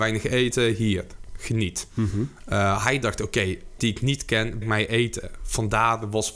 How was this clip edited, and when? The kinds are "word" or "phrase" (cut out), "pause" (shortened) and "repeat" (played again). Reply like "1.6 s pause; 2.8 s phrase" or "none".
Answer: 3.8 s word; 4.6 s word